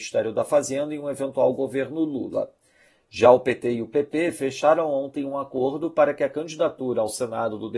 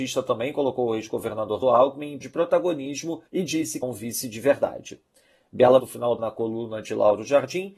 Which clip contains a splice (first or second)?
second